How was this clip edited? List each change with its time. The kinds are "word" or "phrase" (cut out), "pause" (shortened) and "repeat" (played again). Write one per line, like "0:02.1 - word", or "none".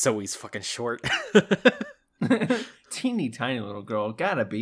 none